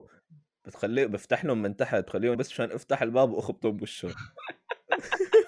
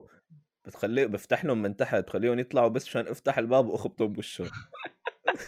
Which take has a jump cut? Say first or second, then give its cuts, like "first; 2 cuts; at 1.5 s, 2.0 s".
first; 1 cut; at 2.3 s